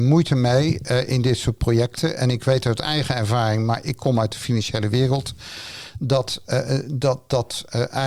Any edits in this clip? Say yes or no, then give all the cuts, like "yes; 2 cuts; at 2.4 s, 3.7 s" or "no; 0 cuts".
no; 0 cuts